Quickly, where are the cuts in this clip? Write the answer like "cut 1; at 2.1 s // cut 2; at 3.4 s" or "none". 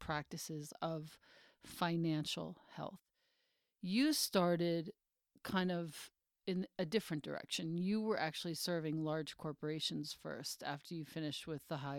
none